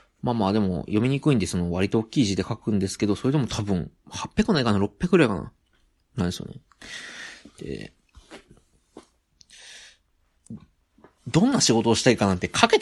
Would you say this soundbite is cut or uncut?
cut